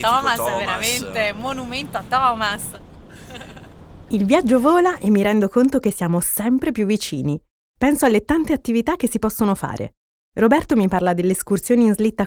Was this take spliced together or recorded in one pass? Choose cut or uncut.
uncut